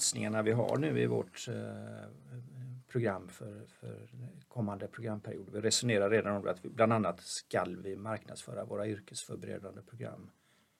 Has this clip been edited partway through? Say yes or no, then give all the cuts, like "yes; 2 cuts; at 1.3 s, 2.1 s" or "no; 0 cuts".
no; 0 cuts